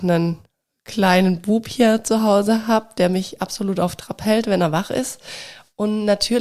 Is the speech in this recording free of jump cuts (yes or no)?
yes